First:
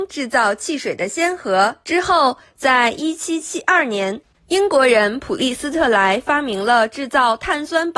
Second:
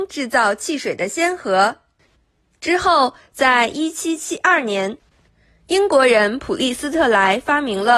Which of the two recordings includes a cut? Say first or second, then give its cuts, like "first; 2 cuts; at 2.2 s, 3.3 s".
first; 2 cuts; at 1.8 s, 4.4 s